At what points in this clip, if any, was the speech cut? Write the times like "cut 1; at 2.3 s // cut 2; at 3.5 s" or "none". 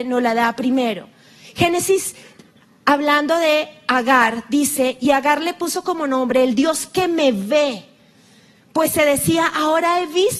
none